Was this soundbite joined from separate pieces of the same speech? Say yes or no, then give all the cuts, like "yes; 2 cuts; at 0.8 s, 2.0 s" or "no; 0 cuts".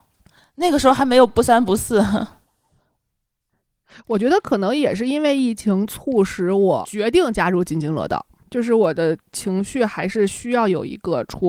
no; 0 cuts